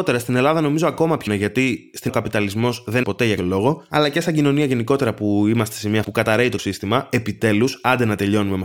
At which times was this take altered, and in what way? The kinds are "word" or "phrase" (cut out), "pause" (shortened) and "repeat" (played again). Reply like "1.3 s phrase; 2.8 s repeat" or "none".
1.3 s word; 2.1 s word; 3.0 s word; 3.4 s word; 6.0 s word; 6.6 s word

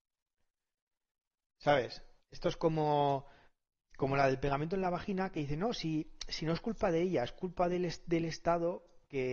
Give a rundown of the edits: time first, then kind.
none

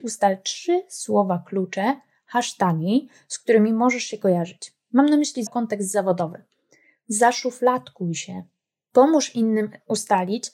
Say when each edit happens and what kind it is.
5.5 s word

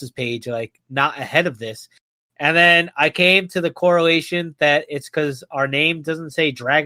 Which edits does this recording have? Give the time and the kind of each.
none

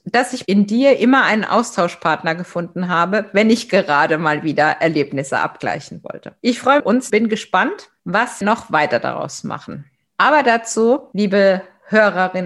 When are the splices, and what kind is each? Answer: 6.4 s pause; 6.8 s phrase; 7.1 s phrase; 8.4 s word

